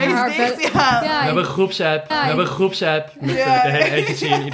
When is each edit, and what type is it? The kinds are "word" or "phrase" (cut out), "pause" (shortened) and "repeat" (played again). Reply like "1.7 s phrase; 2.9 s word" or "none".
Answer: 2.1 s repeat